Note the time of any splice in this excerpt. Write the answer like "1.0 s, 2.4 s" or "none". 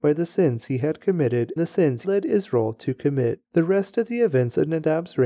1.6 s, 2.0 s, 3.4 s